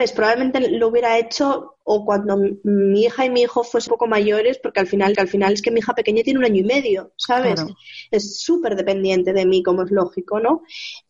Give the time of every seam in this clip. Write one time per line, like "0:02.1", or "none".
0:03.9
0:05.1